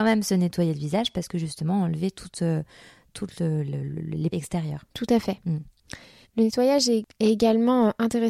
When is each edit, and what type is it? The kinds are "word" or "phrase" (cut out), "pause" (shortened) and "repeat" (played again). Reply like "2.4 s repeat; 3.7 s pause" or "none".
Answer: 4.3 s phrase; 4.9 s pause; 6.2 s pause